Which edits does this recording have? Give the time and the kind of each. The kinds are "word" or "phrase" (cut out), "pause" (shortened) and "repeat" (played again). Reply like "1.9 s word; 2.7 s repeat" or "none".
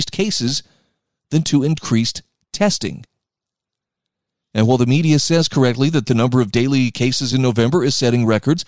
none